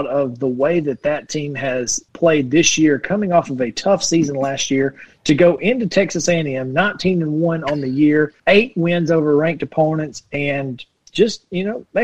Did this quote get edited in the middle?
yes; 2 cuts; at 2.1 s, 8.4 s

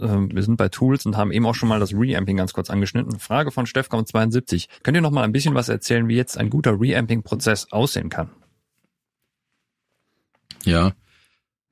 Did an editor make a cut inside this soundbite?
yes; 1 cut; at 4.7 s

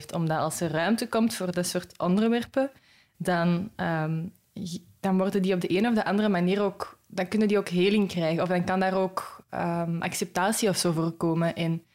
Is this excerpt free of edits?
yes; 0 cuts

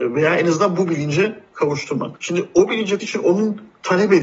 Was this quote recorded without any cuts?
no; 1 cut; at 3.0 s

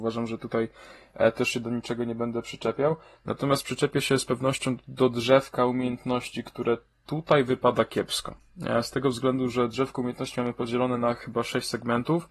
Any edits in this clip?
no; 0 cuts

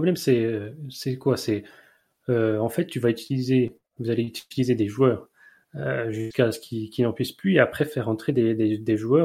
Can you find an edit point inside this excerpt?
no; 0 cuts

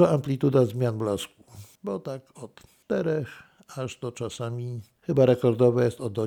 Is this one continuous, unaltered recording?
yes; 0 cuts

